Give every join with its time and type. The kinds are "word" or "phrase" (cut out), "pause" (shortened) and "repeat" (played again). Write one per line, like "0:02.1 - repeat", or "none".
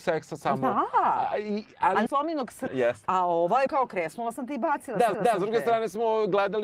0:02.1 - phrase
0:02.7 - word
0:03.7 - word
0:05.1 - repeat